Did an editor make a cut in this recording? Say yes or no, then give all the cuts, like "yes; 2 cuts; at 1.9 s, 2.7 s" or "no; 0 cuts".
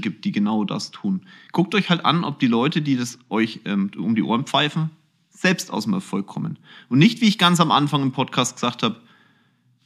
no; 0 cuts